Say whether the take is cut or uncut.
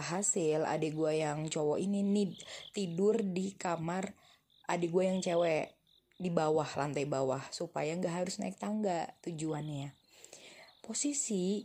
uncut